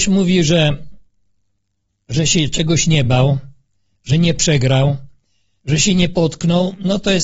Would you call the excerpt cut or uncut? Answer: uncut